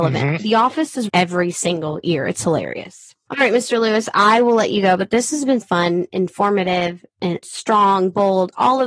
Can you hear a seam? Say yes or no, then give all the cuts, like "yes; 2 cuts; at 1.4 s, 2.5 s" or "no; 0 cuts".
yes; 3 cuts; at 1.1 s, 5.6 s, 7.4 s